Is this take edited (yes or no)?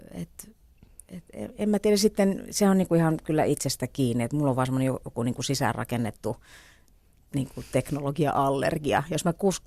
no